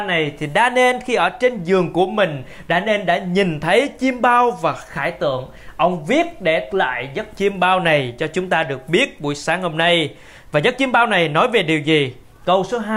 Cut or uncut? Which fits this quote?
cut